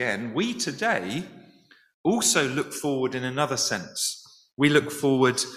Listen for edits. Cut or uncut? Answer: uncut